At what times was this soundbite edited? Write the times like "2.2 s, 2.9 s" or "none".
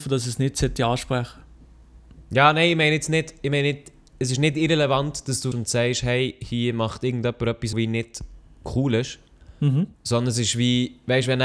5.5 s, 7.7 s, 9.9 s